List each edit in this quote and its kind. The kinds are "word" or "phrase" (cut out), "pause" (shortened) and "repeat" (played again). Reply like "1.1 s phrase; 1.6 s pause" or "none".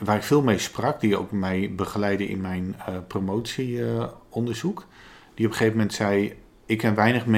none